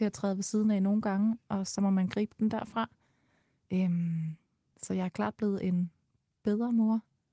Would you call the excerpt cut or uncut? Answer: uncut